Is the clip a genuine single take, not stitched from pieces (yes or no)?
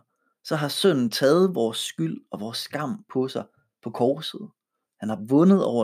yes